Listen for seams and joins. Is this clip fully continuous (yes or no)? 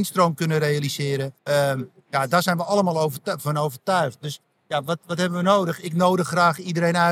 no